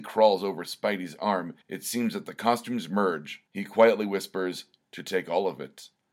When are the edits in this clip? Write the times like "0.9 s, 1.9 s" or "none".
1.6 s, 3.5 s

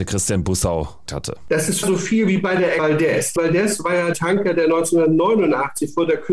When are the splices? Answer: 1.1 s, 1.8 s, 2.8 s, 3.4 s, 4.1 s

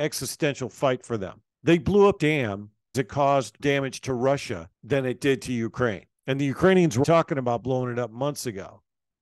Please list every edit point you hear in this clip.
1.5 s, 2.2 s, 2.9 s, 3.6 s, 4.7 s, 6.2 s, 7.0 s

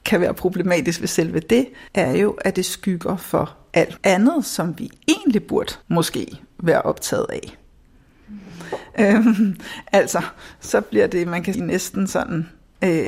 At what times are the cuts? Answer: 1.9 s, 4.0 s, 5.8 s, 11.5 s

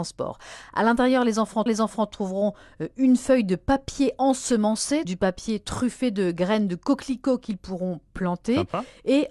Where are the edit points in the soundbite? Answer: 1.7 s, 5.0 s

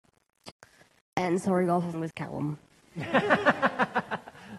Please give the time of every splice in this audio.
1.9 s

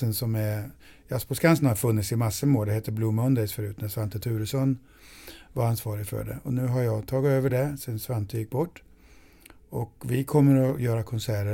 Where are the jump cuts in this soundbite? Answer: none

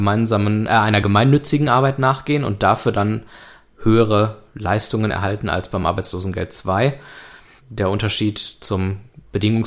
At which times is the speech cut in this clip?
none

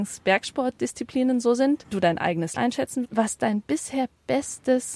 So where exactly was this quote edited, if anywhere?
1.9 s, 2.6 s, 3.0 s

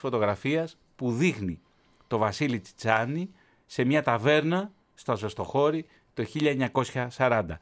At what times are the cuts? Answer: none

